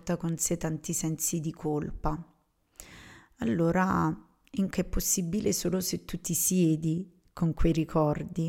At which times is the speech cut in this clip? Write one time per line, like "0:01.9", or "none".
0:04.7